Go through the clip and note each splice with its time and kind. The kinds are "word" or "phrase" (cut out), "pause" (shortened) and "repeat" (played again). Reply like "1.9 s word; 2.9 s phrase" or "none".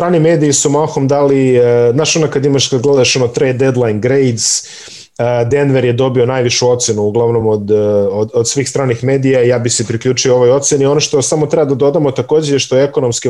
none